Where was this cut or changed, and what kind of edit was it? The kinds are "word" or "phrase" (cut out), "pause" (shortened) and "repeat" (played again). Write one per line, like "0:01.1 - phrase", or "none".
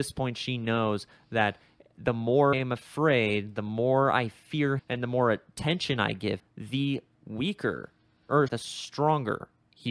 0:02.5 - word
0:04.8 - word
0:06.4 - word
0:08.5 - word

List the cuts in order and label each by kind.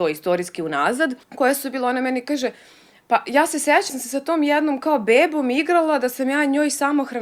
0:01.2 - pause
0:03.9 - word

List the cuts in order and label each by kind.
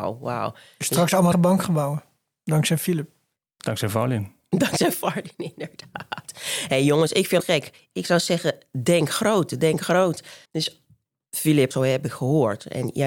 0:01.3 - word
0:07.4 - phrase
0:10.4 - pause
0:11.7 - phrase

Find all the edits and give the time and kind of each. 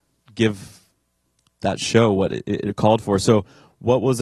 none

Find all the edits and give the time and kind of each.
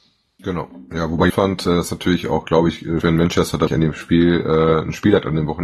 0:01.3 - word
0:03.0 - word
0:03.7 - word

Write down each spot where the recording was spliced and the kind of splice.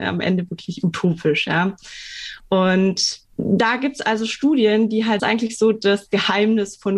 0:05.2 - phrase

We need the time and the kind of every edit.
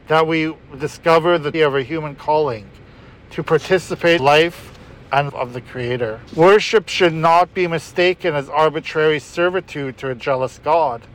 0:01.5 - phrase
0:04.2 - phrase
0:05.3 - word
0:06.3 - pause

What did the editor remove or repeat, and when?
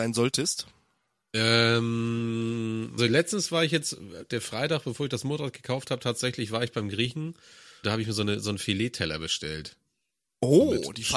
0:03.0 - word
0:07.8 - word

